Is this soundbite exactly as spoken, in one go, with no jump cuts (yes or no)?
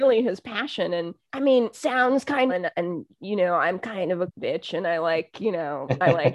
no